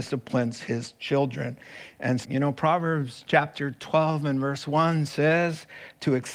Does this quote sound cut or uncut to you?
cut